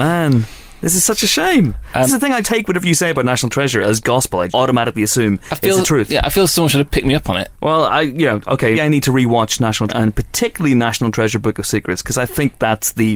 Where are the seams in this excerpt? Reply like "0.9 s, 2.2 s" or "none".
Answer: 2.1 s, 2.4 s, 4.5 s, 7.5 s, 8.7 s, 9.9 s